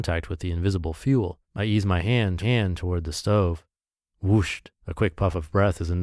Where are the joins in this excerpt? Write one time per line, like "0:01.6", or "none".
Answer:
0:01.4
0:02.4
0:04.8